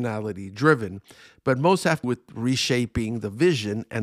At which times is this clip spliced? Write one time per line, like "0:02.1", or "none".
0:02.0